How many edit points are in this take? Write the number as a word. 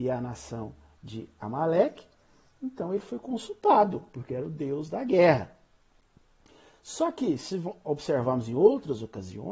zero